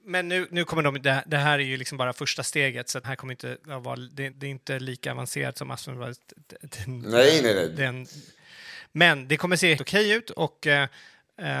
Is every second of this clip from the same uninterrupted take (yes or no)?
no